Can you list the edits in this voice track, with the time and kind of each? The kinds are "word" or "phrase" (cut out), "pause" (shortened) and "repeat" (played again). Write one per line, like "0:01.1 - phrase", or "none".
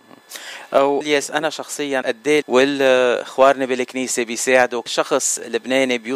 0:01.0 - word
0:02.0 - word
0:02.4 - word
0:04.9 - word